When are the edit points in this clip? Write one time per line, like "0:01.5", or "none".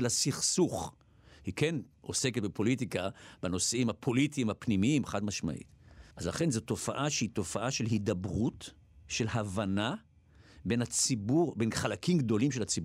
0:06.1